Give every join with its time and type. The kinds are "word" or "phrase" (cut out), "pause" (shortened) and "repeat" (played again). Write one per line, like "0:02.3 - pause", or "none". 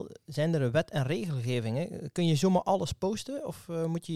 none

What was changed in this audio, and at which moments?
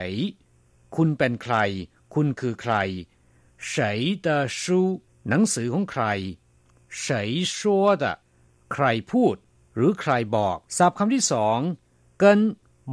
0:05.1 - pause
0:10.7 - pause

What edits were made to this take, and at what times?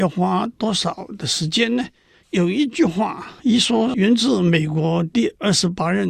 0:02.1 - pause
0:03.4 - pause

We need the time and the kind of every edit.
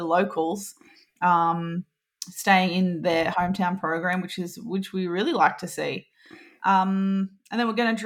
none

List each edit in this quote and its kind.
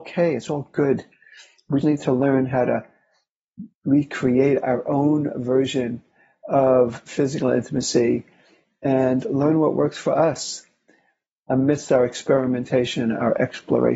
0:01.8 - word
0:03.7 - pause

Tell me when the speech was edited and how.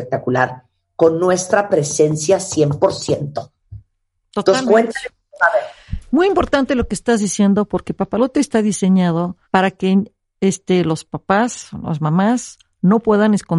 0:09.4 - pause

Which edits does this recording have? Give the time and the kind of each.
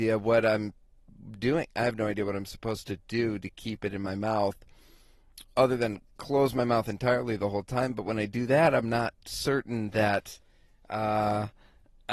none

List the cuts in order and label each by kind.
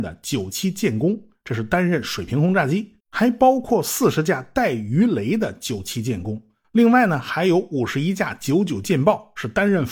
0:03.0 - pause

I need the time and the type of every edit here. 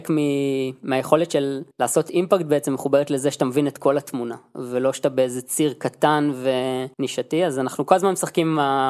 0:01.7 - pause
0:06.9 - pause

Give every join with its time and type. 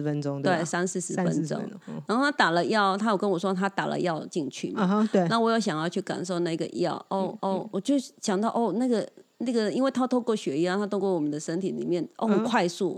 0:07.4 - repeat

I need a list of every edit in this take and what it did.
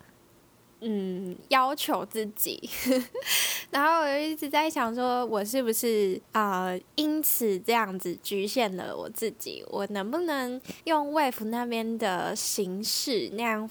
0:06.2 - pause
0:10.8 - pause

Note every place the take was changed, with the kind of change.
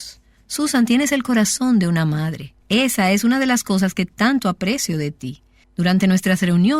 0:02.6 - pause
0:05.6 - pause

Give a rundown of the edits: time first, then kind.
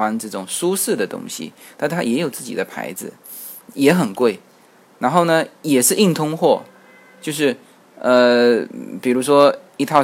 none

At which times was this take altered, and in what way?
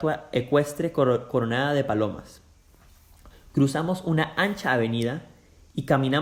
none

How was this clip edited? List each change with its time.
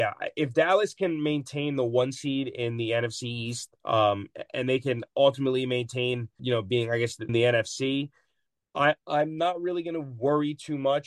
0:03.8 - pause
0:06.4 - word
0:07.3 - phrase

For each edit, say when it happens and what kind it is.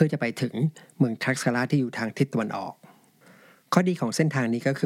none

